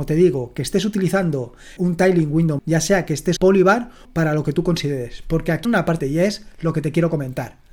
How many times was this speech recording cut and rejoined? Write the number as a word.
six